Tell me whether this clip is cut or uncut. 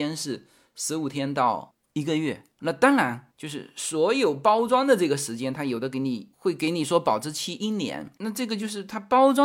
cut